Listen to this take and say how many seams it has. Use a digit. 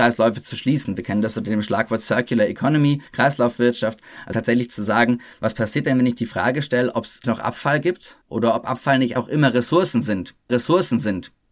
6